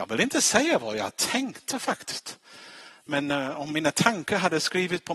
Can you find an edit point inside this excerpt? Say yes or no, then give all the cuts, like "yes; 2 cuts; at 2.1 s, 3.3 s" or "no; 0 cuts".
no; 0 cuts